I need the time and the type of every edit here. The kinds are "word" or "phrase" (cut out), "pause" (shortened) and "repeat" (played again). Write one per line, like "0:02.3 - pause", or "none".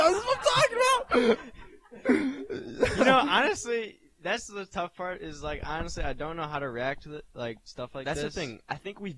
none